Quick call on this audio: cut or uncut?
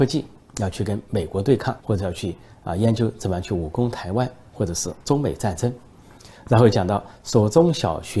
cut